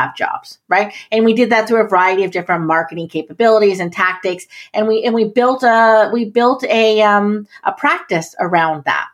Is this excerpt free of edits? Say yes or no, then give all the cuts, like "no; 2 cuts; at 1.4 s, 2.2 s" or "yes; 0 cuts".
yes; 0 cuts